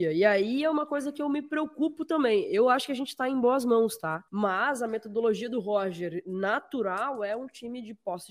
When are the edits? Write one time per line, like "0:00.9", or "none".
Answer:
0:04.3